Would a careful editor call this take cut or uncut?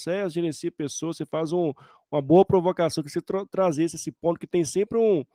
uncut